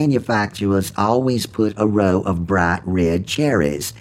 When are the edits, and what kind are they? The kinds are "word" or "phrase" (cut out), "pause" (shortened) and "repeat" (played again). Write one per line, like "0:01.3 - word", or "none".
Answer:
none